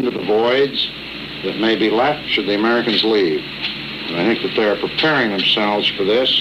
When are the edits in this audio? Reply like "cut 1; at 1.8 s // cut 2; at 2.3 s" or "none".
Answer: cut 1; at 1.4 s